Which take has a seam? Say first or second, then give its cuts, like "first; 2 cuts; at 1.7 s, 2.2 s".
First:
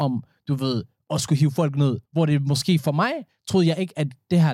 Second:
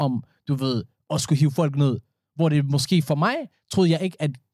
first; 1 cut; at 2.1 s